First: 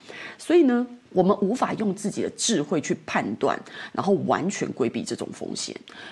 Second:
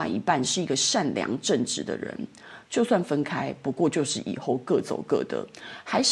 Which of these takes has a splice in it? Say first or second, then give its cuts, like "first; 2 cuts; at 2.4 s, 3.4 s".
first; 1 cut; at 1.0 s